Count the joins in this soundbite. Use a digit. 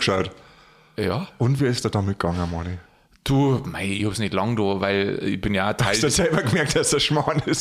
0